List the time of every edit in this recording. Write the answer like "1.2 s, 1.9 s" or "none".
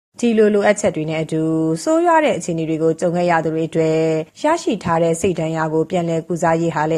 4.3 s